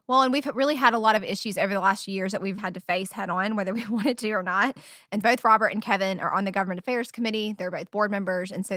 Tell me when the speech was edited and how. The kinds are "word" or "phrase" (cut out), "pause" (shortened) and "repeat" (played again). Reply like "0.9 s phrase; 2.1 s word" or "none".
2.6 s word; 5.2 s word